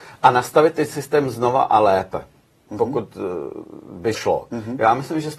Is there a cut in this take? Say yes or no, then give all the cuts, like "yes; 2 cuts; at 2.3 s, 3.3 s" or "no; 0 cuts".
yes; 1 cut; at 4.1 s